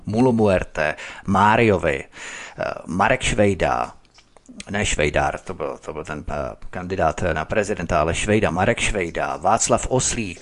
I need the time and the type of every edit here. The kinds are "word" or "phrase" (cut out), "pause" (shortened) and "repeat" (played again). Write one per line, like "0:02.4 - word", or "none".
none